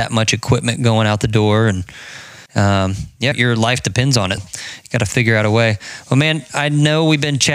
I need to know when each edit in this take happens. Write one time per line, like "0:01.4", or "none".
0:02.5
0:03.3
0:04.4